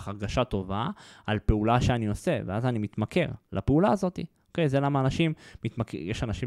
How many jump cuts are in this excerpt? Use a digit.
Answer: 0